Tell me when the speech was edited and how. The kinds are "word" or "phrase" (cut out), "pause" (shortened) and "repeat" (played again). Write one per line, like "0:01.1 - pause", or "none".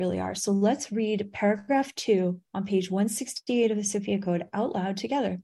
0:02.5 - pause